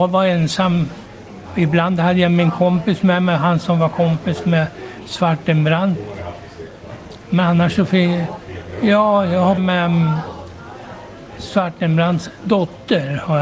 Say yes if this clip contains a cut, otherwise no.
yes